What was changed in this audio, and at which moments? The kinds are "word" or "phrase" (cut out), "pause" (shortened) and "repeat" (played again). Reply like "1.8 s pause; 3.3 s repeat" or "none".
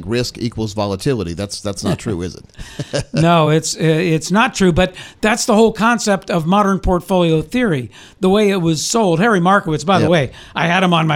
none